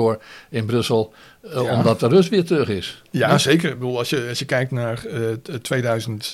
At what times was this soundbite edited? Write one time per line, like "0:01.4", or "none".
none